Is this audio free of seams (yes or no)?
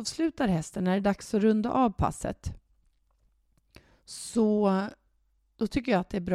yes